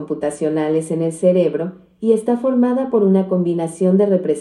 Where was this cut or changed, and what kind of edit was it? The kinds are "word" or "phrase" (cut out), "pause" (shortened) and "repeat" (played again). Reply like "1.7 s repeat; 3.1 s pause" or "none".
none